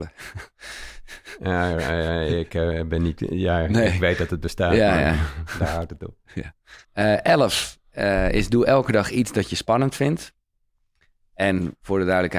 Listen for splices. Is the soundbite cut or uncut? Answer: cut